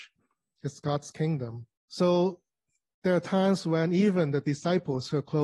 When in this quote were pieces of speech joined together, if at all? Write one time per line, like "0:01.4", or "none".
0:01.8